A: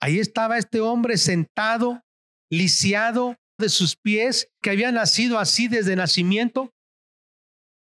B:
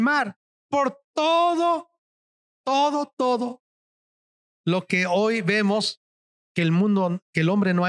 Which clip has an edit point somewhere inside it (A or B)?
A